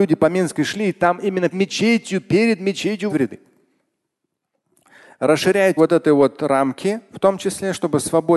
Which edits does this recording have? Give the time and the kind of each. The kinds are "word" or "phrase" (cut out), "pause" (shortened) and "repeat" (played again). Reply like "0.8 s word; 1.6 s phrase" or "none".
1.5 s word; 3.1 s word; 5.8 s word